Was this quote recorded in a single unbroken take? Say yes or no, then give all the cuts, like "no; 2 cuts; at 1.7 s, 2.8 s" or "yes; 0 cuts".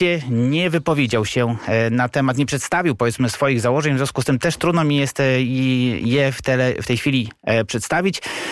yes; 0 cuts